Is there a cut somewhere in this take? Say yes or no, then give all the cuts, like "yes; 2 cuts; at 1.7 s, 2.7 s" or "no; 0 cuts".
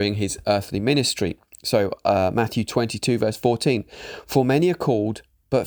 no; 0 cuts